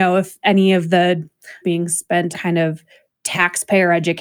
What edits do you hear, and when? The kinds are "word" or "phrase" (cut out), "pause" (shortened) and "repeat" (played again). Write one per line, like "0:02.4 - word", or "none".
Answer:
0:01.6 - phrase
0:02.3 - word